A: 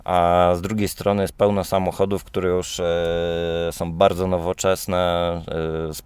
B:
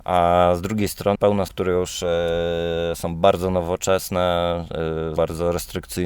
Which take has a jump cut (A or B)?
B